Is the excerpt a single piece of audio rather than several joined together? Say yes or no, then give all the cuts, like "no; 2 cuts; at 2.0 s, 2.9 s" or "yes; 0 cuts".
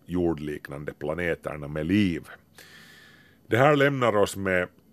yes; 0 cuts